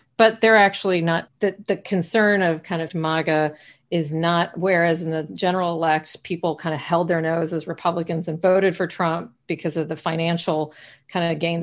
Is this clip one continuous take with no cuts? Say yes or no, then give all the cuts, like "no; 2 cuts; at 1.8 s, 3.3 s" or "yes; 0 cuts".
no; 2 cuts; at 1.3 s, 2.9 s